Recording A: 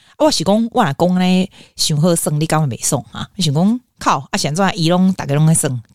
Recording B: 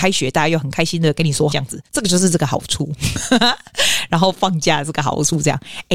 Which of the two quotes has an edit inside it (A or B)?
B